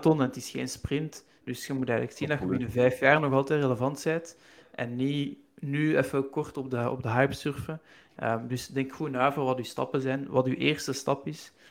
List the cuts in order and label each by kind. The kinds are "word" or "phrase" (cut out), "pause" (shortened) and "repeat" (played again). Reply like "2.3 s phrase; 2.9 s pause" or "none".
none